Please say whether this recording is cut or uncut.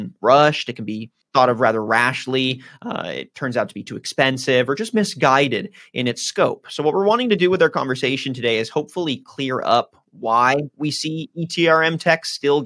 uncut